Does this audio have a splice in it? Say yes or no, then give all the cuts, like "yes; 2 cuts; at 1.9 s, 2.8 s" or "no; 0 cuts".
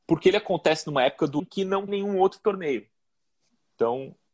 yes; 2 cuts; at 1.4 s, 1.9 s